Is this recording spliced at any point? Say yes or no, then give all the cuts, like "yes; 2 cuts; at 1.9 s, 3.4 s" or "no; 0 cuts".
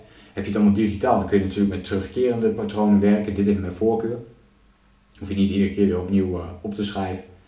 no; 0 cuts